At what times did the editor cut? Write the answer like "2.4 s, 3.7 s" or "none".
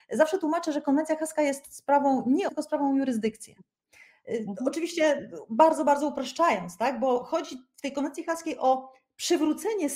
2.5 s